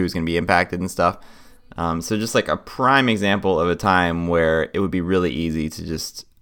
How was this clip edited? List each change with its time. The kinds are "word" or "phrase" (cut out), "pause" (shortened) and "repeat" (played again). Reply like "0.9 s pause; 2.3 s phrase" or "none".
none

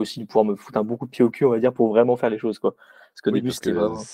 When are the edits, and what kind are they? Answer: none

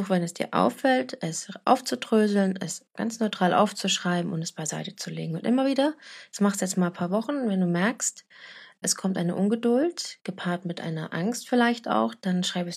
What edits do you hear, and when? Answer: 8.8 s word

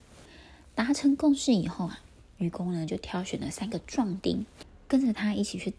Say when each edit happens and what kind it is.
none

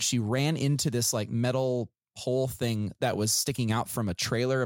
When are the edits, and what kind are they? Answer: none

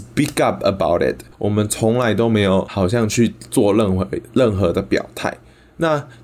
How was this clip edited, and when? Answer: 1.3 s pause

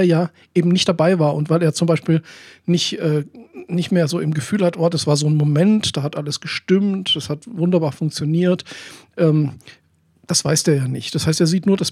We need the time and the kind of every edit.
none

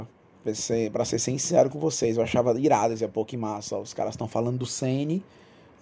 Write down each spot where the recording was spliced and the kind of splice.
none

